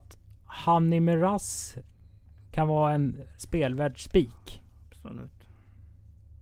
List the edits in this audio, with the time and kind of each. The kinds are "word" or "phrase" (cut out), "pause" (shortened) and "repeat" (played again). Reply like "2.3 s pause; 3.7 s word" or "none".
3.4 s word